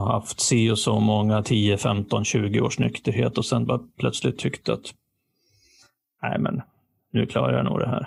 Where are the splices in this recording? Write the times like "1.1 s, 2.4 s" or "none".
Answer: none